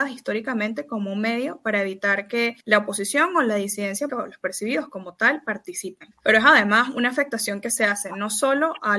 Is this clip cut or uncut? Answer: cut